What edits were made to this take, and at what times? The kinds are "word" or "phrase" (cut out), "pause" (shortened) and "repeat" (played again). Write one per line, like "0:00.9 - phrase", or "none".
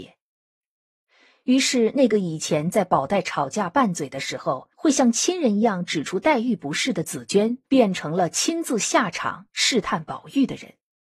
0:04.7 - pause
0:07.6 - pause